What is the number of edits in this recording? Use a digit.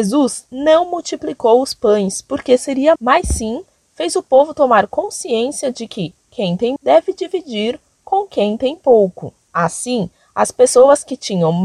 2